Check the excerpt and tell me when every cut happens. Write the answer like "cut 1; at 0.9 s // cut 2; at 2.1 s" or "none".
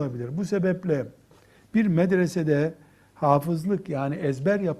none